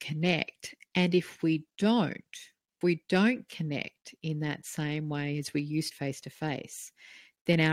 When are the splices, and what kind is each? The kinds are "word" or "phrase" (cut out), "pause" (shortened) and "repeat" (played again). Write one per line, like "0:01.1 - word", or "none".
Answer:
0:02.8 - word
0:05.9 - word